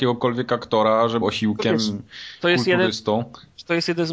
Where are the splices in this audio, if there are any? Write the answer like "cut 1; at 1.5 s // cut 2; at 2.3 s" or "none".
cut 1; at 1.2 s